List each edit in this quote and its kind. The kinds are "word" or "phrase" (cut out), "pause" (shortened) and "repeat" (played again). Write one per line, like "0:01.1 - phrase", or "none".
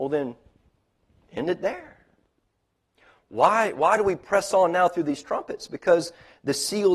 none